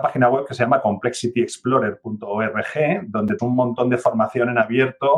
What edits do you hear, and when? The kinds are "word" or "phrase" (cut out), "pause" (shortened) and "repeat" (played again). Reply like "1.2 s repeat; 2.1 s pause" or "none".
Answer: 3.4 s word